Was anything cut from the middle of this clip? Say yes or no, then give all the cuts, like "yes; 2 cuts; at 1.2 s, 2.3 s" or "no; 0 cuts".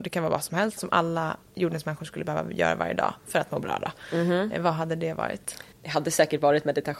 yes; 1 cut; at 5.7 s